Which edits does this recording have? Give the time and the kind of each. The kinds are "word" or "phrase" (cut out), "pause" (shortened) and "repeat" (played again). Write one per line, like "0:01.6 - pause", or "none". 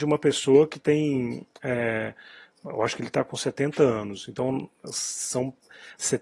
none